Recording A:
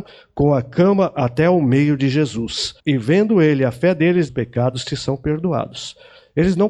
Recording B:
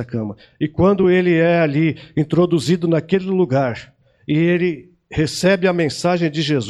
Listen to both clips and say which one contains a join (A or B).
A